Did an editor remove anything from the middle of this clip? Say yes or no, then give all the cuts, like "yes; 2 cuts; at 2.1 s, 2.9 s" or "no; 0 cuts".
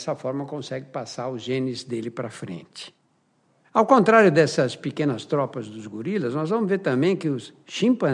no; 0 cuts